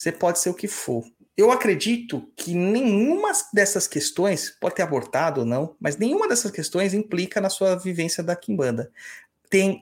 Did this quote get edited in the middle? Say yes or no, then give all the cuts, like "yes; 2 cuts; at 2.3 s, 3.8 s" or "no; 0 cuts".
yes; 1 cut; at 1.3 s